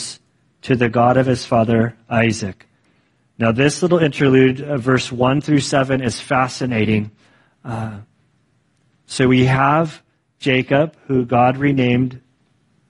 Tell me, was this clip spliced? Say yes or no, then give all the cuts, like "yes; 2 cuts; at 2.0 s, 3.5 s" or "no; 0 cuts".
no; 0 cuts